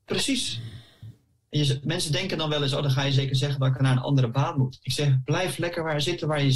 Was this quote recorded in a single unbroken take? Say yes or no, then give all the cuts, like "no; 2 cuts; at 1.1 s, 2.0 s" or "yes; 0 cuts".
yes; 0 cuts